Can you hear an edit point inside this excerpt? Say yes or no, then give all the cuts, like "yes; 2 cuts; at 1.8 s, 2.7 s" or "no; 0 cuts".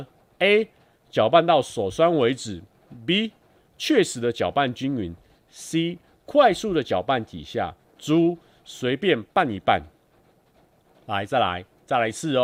no; 0 cuts